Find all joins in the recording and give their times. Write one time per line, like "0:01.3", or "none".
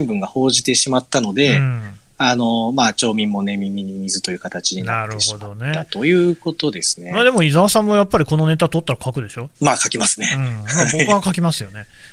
0:09.5